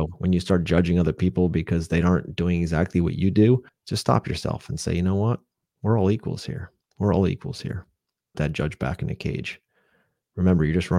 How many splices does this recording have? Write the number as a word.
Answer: three